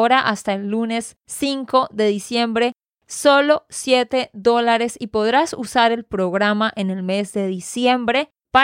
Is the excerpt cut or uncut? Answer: uncut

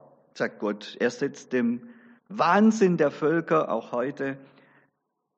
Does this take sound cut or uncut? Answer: uncut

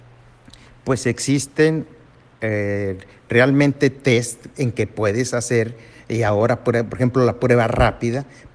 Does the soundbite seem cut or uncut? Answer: uncut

